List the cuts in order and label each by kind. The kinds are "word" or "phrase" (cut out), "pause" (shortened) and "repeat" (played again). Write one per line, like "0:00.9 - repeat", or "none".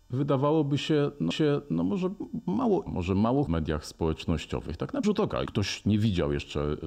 0:01.3 - repeat
0:02.9 - phrase
0:03.5 - phrase
0:05.0 - word
0:05.5 - word